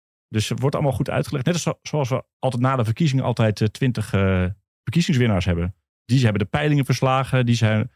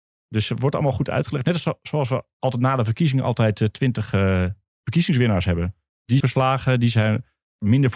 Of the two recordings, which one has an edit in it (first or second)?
second